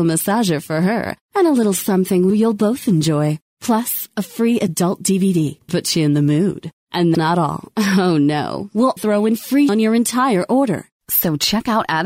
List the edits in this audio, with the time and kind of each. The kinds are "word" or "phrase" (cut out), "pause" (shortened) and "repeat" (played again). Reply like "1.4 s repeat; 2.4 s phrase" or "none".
2.3 s word; 5.7 s word; 7.1 s word; 9.0 s word; 9.7 s word